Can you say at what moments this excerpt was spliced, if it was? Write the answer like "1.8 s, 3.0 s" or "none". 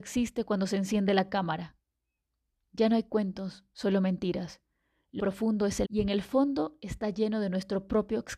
5.2 s, 5.8 s